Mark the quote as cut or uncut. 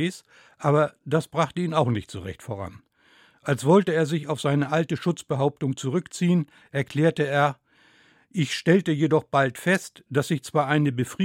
uncut